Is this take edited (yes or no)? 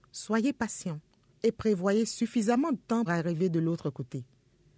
yes